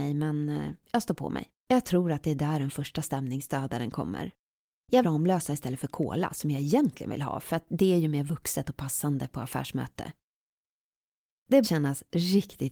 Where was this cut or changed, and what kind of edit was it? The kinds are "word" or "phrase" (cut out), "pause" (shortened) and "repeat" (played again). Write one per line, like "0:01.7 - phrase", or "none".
0:01.6 - pause
0:05.0 - word
0:11.6 - word